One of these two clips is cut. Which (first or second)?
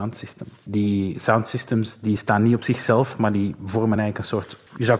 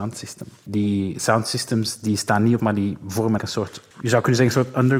second